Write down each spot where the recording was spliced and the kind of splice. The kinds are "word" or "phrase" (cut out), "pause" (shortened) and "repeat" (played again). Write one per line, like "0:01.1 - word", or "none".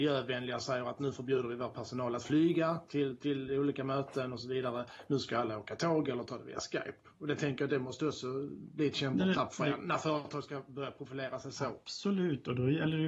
none